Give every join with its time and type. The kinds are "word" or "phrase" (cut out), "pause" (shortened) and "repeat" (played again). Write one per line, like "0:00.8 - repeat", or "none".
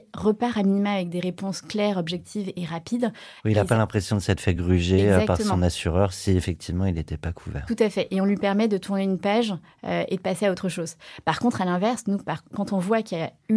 none